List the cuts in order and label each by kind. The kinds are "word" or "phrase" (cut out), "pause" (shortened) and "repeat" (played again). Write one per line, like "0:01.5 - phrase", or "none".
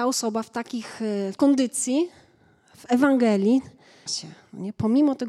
0:01.4 - word
0:04.1 - word